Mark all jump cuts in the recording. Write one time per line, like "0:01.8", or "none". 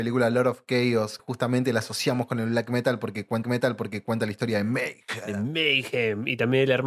0:01.2
0:03.4